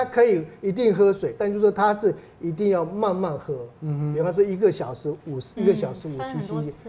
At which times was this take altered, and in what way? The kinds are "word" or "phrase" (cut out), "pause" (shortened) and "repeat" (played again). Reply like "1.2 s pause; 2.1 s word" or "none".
5.5 s word